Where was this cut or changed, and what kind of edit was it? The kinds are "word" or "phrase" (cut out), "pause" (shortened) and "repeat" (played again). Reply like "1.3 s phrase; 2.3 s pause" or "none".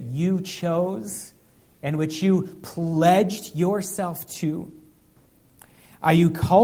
none